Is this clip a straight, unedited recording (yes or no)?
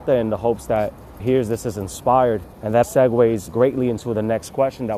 no